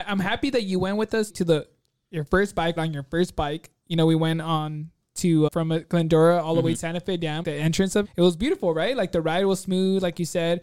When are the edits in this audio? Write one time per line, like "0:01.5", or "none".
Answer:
0:01.3
0:02.8
0:05.5
0:06.7
0:07.4
0:08.0